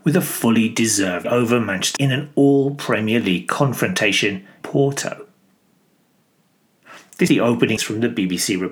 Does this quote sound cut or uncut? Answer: cut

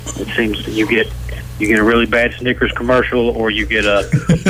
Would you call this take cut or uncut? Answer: uncut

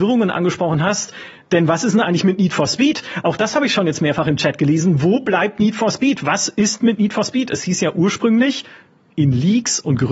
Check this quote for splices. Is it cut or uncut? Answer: uncut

